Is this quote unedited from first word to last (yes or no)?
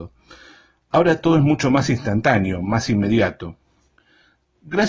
yes